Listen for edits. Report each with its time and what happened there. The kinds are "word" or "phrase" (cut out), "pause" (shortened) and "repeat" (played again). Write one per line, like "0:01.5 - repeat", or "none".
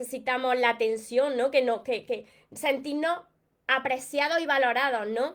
none

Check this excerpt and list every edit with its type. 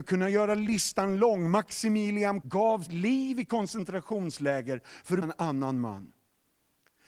0:02.4 - word
0:02.9 - word
0:05.2 - word

